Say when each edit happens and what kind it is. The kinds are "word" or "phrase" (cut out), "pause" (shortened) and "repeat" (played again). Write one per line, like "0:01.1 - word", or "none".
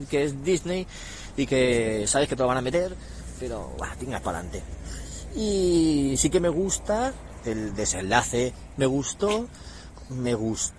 0:04.2 - word
0:07.4 - word